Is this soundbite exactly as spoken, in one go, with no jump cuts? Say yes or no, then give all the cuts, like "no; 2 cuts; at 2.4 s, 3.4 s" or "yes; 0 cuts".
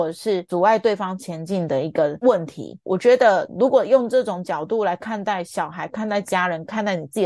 no; 1 cut; at 2.8 s